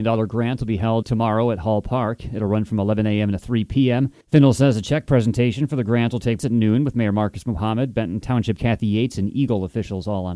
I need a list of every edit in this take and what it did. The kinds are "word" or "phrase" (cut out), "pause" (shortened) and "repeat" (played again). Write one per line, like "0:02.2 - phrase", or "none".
0:01.0 - word
0:04.2 - pause
0:06.4 - word
0:08.6 - word